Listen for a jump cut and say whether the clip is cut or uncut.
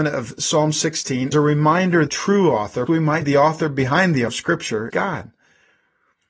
cut